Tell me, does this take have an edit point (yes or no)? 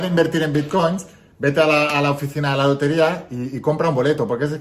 no